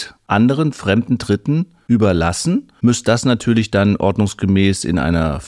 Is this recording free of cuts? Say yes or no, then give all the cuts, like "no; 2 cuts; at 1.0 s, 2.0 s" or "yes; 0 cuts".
yes; 0 cuts